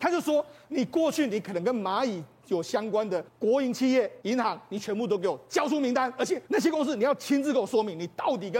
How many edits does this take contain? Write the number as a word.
three